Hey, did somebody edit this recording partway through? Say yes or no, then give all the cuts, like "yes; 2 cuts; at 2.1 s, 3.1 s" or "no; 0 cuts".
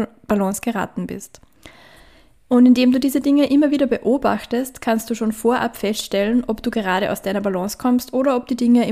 no; 0 cuts